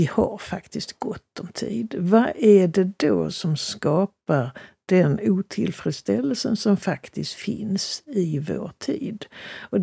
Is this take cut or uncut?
uncut